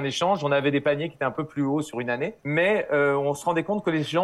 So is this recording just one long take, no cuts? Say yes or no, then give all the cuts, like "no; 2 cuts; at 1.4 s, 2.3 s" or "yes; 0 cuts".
no; 1 cut; at 2.4 s